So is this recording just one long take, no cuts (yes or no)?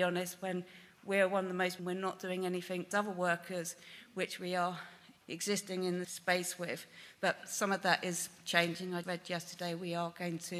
no